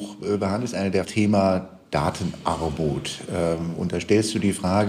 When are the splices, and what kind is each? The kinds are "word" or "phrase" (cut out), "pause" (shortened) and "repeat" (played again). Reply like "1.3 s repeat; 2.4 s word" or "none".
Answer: 1.0 s phrase